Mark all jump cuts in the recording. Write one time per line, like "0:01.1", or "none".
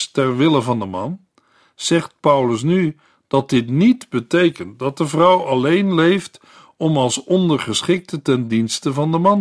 none